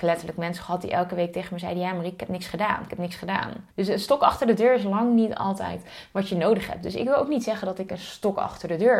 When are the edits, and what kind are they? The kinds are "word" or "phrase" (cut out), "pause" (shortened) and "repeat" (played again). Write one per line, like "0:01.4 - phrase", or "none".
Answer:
0:03.7 - pause